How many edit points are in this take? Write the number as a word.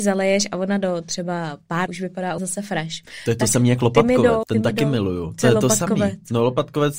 three